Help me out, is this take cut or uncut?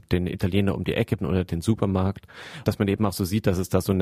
cut